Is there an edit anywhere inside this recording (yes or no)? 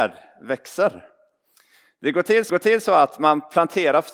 yes